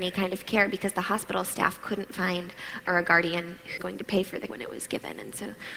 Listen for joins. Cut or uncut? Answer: cut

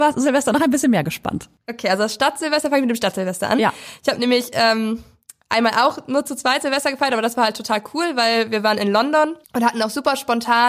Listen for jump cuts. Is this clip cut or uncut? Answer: cut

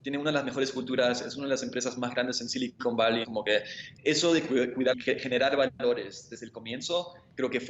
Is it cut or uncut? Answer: cut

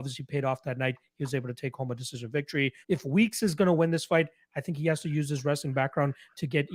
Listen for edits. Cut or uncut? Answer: cut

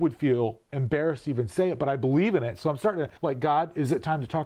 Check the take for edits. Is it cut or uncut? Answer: cut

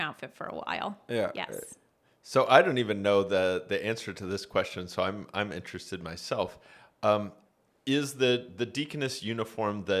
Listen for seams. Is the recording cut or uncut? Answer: uncut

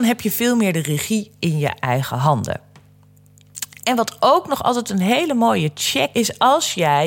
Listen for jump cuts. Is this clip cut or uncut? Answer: cut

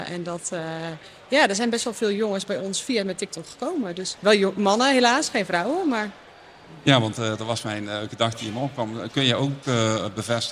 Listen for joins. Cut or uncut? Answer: uncut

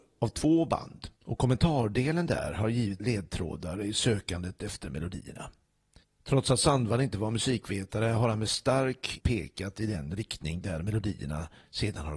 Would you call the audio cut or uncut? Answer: cut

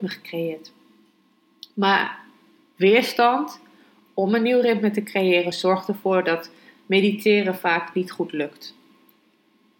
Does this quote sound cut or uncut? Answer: uncut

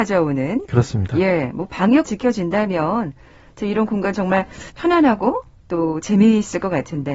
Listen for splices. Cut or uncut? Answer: cut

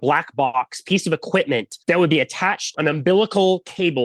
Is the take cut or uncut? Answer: cut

